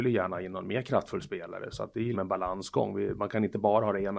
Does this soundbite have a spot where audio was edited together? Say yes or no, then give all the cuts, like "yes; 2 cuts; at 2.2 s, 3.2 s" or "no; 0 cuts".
yes; 2 cuts; at 1.7 s, 2.1 s